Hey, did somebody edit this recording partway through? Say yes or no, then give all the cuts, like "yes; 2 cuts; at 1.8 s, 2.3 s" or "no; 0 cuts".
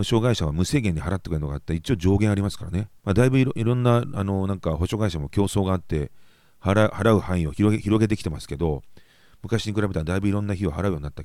yes; 1 cut; at 3.0 s